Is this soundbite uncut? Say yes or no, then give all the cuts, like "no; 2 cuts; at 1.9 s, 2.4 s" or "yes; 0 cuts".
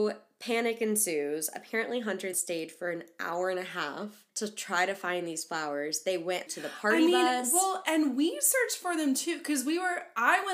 no; 3 cuts; at 2.3 s, 4.3 s, 6.5 s